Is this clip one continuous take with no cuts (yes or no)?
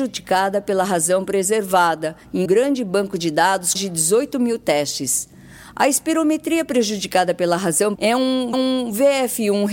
no